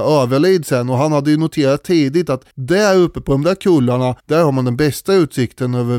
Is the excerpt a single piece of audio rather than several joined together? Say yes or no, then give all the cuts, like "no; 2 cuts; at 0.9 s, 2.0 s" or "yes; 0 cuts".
no; 2 cuts; at 2.5 s, 4.2 s